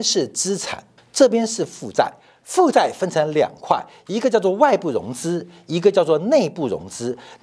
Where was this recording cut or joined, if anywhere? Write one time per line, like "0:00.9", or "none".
0:01.0